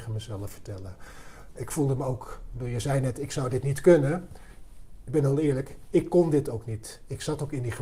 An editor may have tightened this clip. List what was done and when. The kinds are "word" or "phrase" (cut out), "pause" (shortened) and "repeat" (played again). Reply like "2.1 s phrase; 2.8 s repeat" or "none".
none